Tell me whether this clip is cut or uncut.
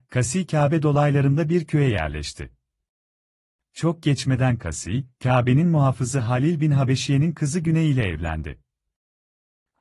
uncut